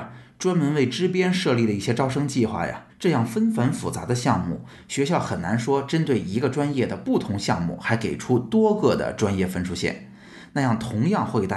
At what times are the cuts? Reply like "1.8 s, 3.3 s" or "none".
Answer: 2.9 s